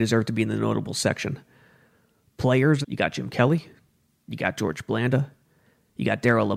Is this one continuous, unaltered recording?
no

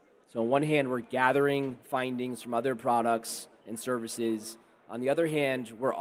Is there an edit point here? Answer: no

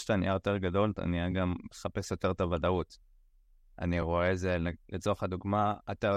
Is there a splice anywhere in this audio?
no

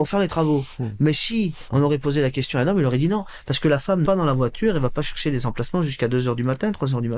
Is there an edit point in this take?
yes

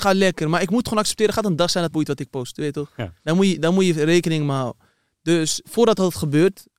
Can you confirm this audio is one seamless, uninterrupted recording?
no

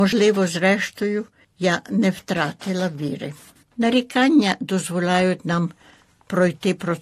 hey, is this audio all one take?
yes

